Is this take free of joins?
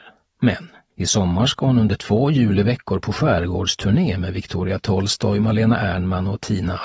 yes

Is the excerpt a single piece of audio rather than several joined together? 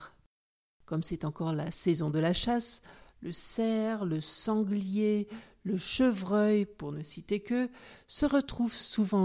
yes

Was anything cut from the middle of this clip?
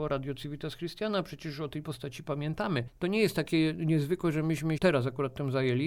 yes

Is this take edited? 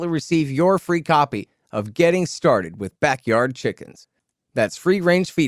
no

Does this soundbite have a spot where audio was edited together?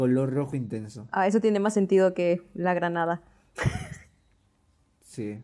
no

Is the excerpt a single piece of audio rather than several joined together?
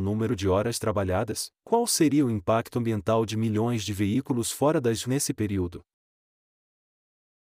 no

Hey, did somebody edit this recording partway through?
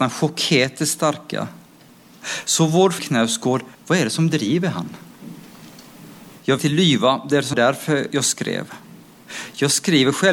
yes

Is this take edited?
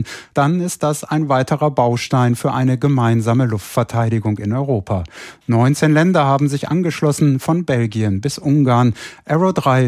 no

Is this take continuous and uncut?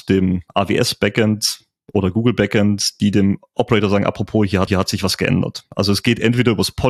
no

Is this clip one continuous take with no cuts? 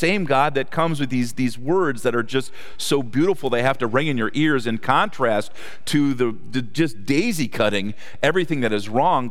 yes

